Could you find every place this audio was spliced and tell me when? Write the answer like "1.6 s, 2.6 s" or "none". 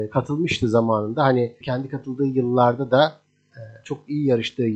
1.6 s